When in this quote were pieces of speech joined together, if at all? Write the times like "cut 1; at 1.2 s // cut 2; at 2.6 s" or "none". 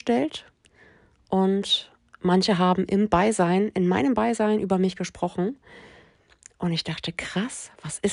none